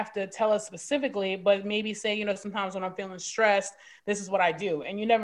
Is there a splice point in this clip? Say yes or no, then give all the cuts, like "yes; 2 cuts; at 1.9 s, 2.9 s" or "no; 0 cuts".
no; 0 cuts